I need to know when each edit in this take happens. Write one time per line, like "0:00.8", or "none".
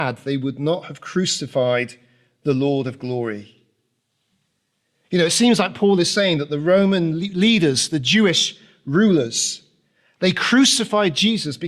none

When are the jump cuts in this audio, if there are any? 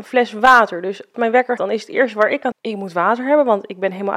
0:01.1
0:01.6
0:02.5

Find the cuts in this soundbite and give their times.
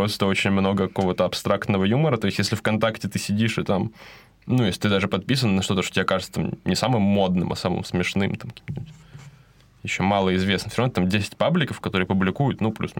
none

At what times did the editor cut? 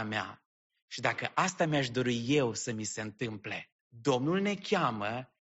0:03.8

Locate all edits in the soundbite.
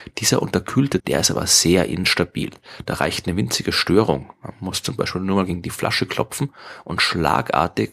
0:01.0

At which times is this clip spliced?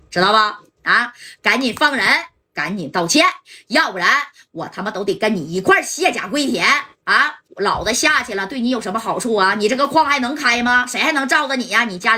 0:07.5

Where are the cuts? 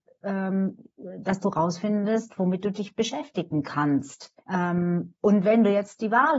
0:04.4

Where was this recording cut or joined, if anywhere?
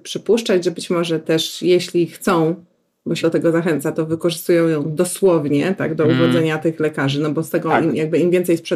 0:01.2
0:03.2

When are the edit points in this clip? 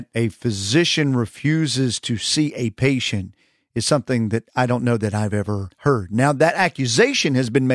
none

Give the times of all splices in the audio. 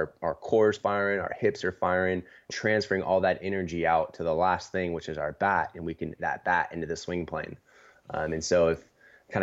0:02.5
0:06.2

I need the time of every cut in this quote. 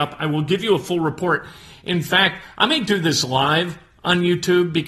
none

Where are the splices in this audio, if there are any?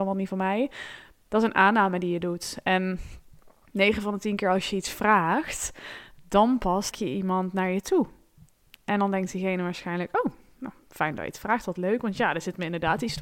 0:06.9

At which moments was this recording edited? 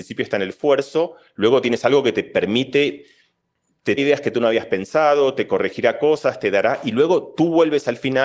0:04.0

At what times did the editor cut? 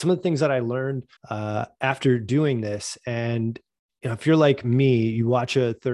0:01.2

